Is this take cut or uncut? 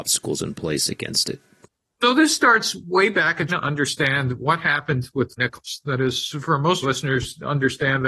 cut